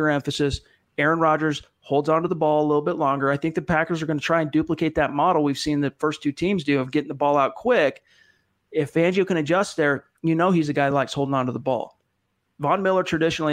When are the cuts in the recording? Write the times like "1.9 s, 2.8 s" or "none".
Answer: none

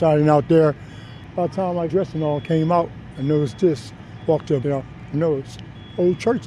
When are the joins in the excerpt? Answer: 1.9 s, 4.6 s, 5.1 s

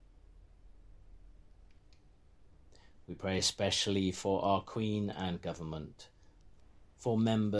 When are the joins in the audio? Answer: none

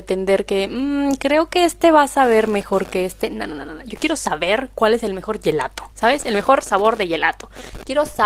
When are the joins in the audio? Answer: 5.9 s

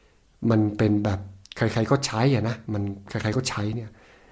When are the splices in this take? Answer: 1.4 s, 2.6 s

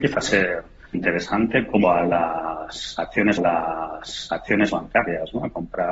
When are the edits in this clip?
0.9 s, 1.8 s, 3.4 s

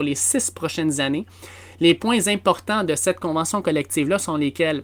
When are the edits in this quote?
none

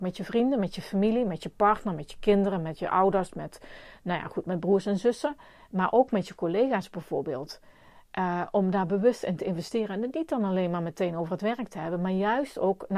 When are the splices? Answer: none

